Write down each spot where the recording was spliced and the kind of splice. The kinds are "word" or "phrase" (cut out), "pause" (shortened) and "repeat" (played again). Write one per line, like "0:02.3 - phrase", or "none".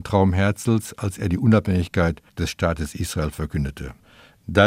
0:02.3 - pause

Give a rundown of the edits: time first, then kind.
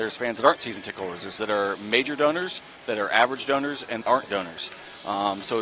0:01.4 - word
0:04.0 - word

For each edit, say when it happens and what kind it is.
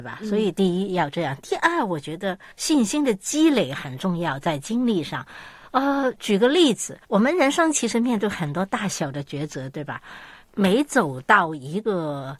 0:02.5 - pause
0:07.0 - pause

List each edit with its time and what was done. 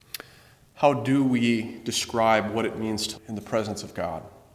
0:03.1 - word

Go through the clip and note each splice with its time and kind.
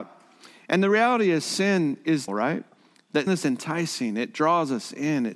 0:02.3 - word
0:03.3 - word

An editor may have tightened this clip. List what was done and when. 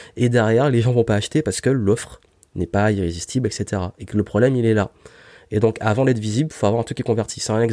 none

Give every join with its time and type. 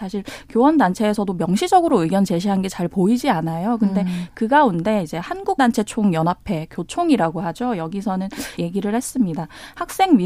0:05.6 - word
0:08.6 - word

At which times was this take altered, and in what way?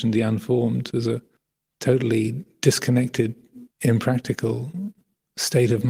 0:01.4 - pause
0:03.7 - pause

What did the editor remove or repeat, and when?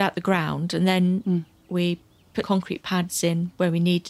0:02.4 - word

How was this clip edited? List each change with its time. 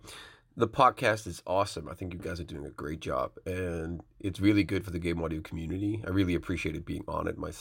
none

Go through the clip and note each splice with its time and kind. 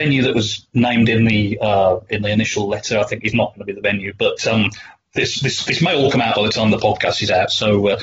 none

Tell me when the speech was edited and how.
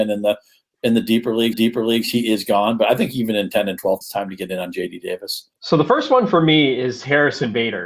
0:01.5 - repeat
0:04.0 - phrase
0:05.6 - pause

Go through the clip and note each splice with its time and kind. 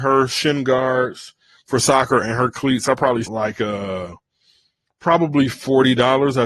0:03.3 - word

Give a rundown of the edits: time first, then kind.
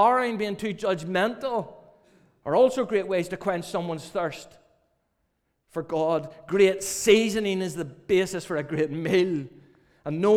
none

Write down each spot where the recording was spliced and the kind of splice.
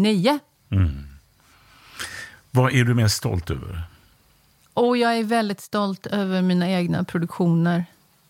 none

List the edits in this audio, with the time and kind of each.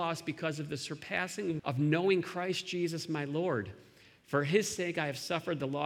0:01.6 - word

